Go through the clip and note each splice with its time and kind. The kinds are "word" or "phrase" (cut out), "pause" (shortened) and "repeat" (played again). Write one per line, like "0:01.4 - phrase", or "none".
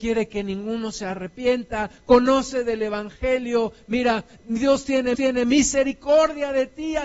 0:05.1 - repeat